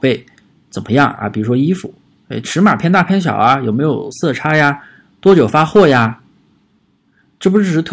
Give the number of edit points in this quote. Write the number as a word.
zero